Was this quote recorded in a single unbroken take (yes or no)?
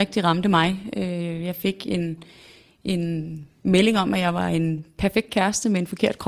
yes